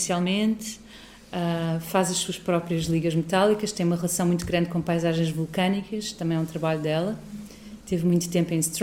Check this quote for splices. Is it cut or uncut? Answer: uncut